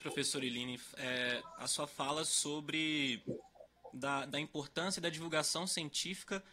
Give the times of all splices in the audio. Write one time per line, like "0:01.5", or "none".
none

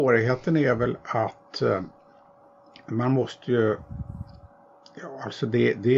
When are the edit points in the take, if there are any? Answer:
none

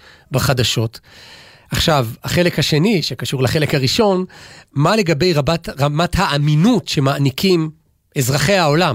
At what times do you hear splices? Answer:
none

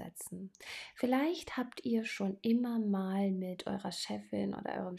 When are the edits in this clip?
none

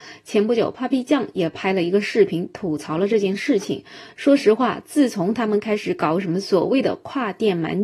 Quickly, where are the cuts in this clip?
none

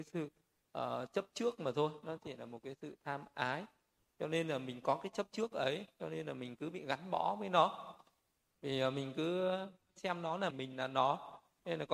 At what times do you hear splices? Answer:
0:10.5

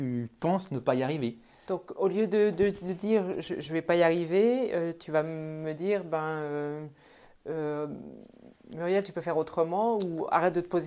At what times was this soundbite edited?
none

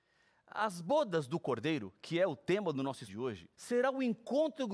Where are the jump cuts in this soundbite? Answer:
0:03.1
0:03.5

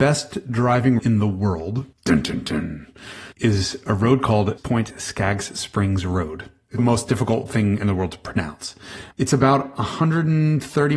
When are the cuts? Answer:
0:01.0
0:01.9
0:03.3
0:04.6
0:06.8
0:09.1

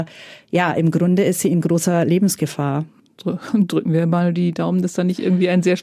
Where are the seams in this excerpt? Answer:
none

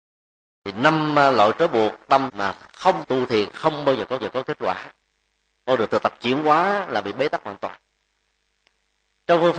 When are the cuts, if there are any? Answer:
0:02.3
0:03.0
0:04.2

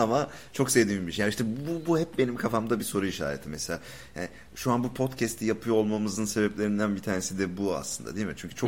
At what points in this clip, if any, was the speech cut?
none

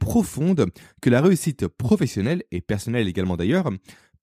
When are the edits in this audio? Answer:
none

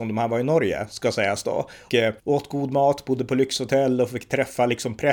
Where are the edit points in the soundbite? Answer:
0:01.9
0:02.2

